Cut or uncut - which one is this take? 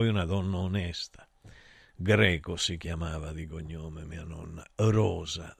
uncut